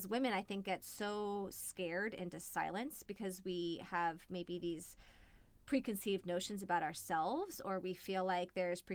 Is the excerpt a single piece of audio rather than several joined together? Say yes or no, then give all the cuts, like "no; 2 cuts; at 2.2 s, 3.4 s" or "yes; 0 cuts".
yes; 0 cuts